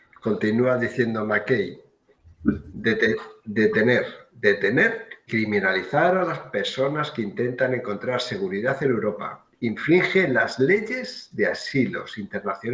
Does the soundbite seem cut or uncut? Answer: cut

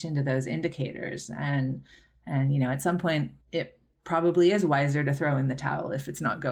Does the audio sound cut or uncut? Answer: cut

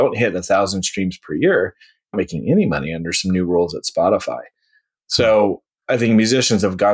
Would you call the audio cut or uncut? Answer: cut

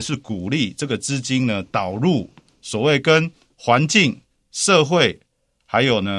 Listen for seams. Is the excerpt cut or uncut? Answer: uncut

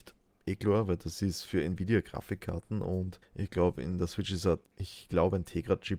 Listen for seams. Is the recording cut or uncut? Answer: cut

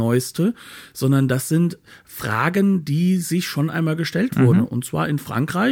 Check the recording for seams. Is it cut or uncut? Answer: uncut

